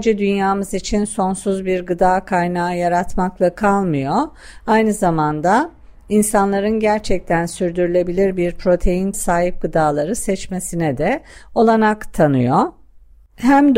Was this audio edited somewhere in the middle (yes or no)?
yes